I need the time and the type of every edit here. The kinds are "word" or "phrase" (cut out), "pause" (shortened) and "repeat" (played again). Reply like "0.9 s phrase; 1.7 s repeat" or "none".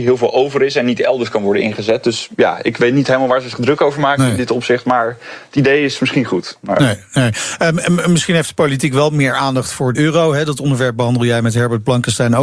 9.9 s phrase